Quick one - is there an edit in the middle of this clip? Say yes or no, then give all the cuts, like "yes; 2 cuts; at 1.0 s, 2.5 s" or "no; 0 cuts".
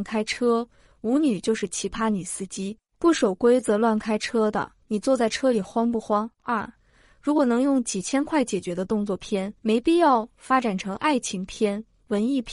yes; 4 cuts; at 2.9 s, 4.8 s, 6.3 s, 9.6 s